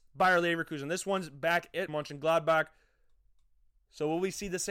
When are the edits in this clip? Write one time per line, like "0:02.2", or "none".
0:01.9